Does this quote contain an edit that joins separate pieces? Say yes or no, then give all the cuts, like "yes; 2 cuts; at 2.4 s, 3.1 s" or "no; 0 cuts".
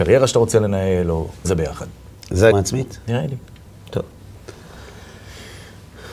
yes; 2 cuts; at 1.4 s, 2.5 s